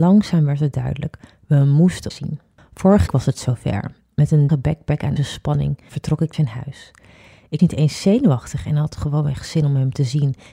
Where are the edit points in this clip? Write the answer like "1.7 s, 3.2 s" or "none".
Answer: 2.1 s, 3.1 s, 4.5 s, 5.2 s, 6.3 s, 7.6 s

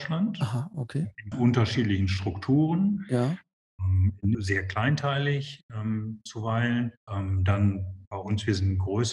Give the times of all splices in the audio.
1.3 s, 4.3 s, 7.0 s

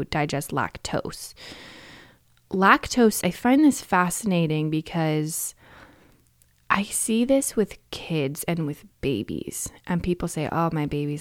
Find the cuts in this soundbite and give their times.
3.2 s

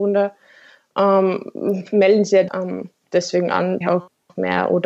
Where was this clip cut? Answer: 2.5 s, 3.8 s

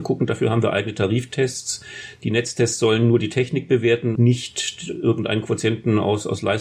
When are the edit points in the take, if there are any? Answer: 4.2 s

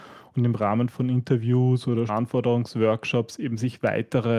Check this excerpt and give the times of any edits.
2.1 s

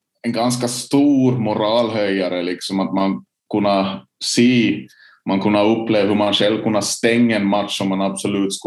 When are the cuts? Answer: none

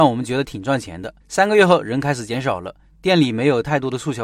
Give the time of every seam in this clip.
1.2 s

